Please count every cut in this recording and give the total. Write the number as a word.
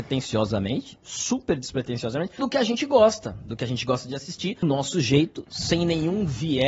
two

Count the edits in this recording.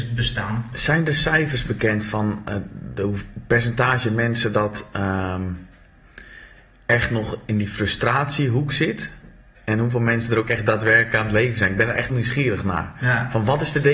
one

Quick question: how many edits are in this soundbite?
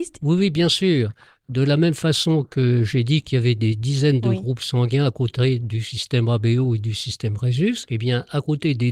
zero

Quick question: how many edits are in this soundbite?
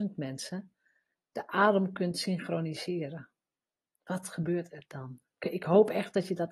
zero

